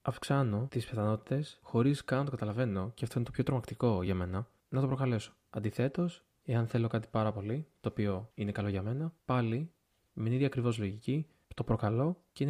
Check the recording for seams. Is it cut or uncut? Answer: uncut